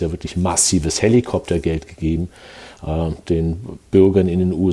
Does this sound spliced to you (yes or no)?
no